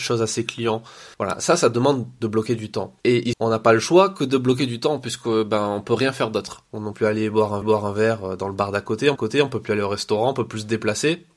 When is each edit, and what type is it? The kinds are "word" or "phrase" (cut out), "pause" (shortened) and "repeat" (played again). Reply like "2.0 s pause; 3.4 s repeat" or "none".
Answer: 1.1 s pause; 3.0 s pause; 3.3 s phrase; 6.9 s word; 7.6 s repeat; 9.2 s repeat